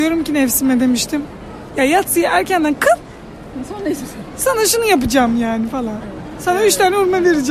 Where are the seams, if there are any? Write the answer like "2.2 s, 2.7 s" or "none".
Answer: none